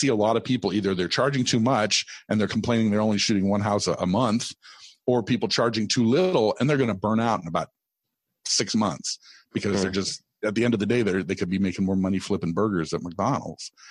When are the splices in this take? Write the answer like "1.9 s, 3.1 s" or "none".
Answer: none